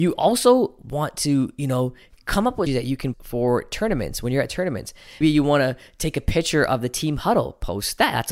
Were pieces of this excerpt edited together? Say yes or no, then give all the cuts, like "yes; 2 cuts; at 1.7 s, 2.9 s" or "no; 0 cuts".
yes; 3 cuts; at 2.7 s, 3.1 s, 5.2 s